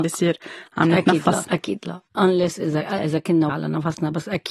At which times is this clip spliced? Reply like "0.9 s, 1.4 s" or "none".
1.4 s, 2.1 s, 3.0 s, 3.5 s